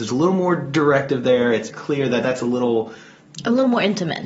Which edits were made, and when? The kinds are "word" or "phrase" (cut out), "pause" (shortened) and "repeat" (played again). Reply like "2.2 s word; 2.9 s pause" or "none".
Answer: 1.7 s word